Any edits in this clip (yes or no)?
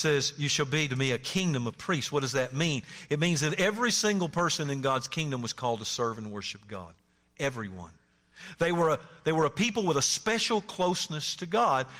no